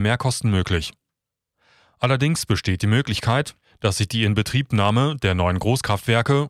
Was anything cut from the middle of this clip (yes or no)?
no